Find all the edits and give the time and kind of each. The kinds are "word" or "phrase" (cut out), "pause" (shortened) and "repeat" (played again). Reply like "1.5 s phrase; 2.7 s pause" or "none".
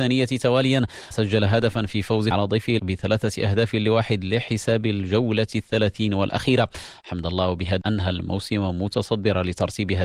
1.1 s word; 2.3 s word; 2.8 s word; 7.8 s word